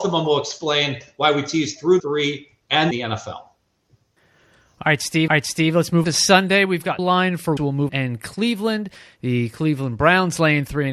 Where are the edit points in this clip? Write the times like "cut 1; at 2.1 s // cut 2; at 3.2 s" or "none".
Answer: cut 1; at 2.0 s // cut 2; at 2.9 s // cut 3; at 4.2 s // cut 4; at 5.3 s // cut 5; at 6.0 s // cut 6; at 7.0 s // cut 7; at 7.6 s // cut 8; at 7.9 s